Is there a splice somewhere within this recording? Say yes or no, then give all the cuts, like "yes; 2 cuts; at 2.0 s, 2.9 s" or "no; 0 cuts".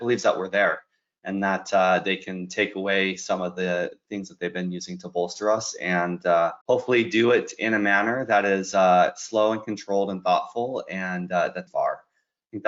yes; 2 cuts; at 6.6 s, 11.7 s